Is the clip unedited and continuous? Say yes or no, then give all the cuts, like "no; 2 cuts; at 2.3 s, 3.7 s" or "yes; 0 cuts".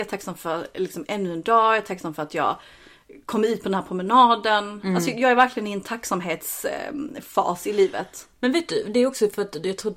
yes; 0 cuts